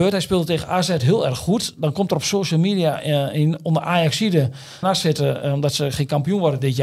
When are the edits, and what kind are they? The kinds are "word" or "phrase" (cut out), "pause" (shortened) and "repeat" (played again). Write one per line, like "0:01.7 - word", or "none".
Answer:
0:04.8 - phrase